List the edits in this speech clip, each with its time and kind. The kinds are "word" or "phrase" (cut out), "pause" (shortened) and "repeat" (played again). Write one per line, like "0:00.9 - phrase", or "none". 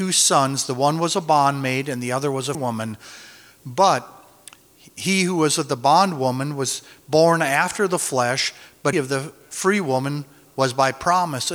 0:02.5 - word
0:08.9 - word